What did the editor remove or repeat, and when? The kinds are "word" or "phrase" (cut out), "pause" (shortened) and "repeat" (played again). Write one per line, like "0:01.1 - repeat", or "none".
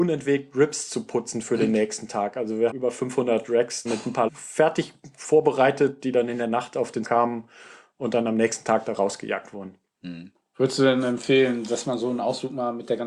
0:02.7 - word
0:03.9 - word
0:04.3 - word
0:07.0 - word